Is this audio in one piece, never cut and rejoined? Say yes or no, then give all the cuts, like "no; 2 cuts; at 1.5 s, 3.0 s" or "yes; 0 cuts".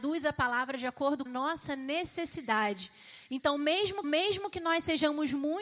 no; 2 cuts; at 1.3 s, 4.0 s